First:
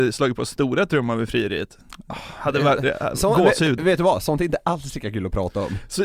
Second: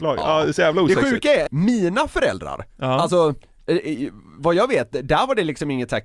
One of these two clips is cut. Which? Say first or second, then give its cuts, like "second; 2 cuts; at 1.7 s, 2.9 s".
second; 1 cut; at 1.5 s